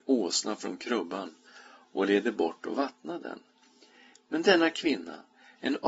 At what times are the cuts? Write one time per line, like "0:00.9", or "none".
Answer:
none